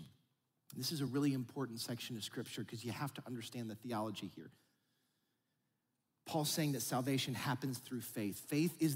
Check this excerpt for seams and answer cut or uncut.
uncut